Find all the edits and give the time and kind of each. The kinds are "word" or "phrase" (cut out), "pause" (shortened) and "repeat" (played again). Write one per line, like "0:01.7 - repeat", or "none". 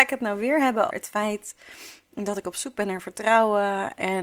0:00.9 - word